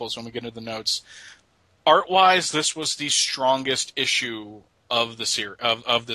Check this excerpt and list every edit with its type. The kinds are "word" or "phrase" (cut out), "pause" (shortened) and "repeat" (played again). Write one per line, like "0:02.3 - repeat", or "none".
none